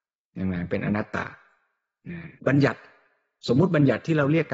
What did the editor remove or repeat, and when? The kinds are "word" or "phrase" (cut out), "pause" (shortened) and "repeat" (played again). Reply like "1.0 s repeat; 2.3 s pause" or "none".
2.4 s pause